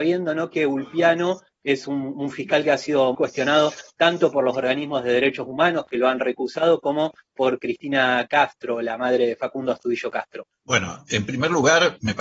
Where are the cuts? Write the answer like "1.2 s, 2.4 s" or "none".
3.1 s

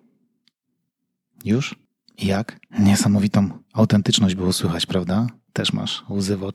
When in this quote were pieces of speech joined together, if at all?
2.7 s

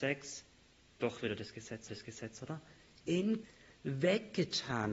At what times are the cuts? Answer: 1.9 s, 3.4 s

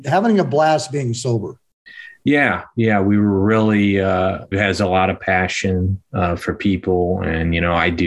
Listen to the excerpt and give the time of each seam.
4.5 s

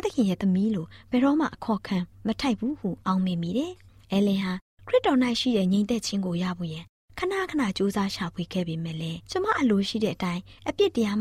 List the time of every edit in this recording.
3.0 s, 9.2 s

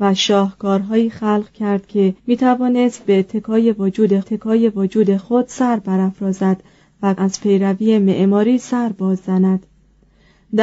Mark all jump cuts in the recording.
2.2 s, 4.2 s, 7.2 s

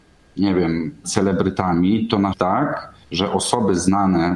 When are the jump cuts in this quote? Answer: 1.0 s, 2.3 s, 3.0 s

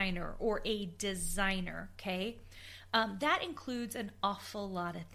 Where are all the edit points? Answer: none

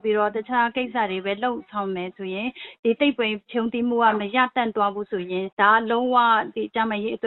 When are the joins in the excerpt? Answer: 5.5 s

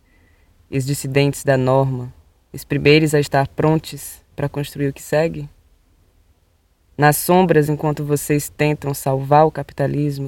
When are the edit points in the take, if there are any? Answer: 2.3 s, 6.1 s

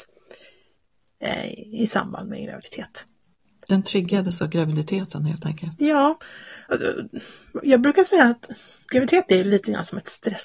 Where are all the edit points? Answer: none

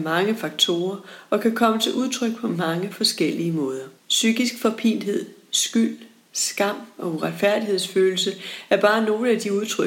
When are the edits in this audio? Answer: 4.0 s

